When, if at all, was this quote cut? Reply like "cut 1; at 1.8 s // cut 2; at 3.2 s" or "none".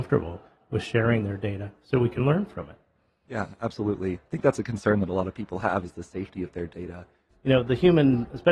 none